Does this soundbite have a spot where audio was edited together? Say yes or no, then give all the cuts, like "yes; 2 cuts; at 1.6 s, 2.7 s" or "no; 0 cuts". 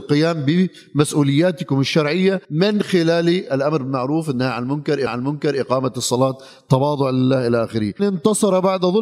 yes; 3 cuts; at 2.4 s, 5.1 s, 8.0 s